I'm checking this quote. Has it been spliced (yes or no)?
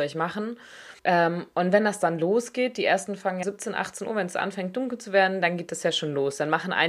yes